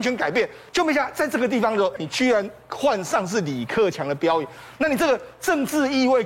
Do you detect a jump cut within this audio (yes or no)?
yes